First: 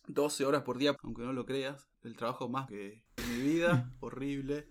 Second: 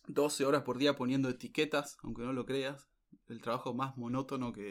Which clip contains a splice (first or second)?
first